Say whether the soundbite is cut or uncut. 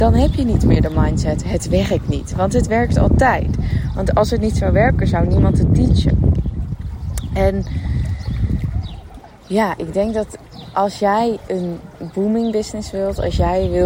uncut